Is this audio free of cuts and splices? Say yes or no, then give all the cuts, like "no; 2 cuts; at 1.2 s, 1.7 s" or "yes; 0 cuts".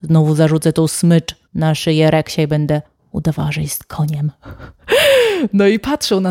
no; 2 cuts; at 1.5 s, 2.9 s